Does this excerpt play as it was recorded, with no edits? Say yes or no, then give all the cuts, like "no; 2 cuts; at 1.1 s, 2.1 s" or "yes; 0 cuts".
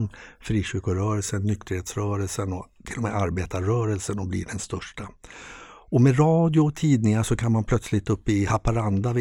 yes; 0 cuts